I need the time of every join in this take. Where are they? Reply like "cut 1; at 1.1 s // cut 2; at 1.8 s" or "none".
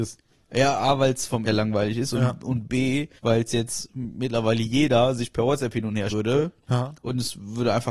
cut 1; at 1.5 s // cut 2; at 3.2 s // cut 3; at 6.1 s